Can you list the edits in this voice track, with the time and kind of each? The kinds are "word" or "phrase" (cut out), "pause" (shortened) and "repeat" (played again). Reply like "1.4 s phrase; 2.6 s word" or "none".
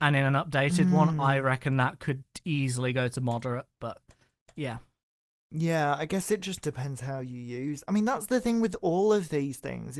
none